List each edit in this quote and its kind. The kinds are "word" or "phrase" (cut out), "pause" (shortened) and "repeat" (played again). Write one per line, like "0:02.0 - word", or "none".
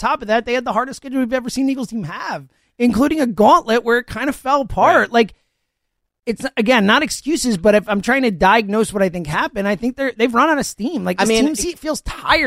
none